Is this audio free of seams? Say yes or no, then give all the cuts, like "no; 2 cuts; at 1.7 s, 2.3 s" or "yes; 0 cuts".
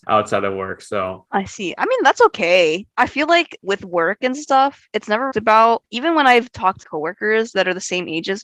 no; 2 cuts; at 5.3 s, 6.8 s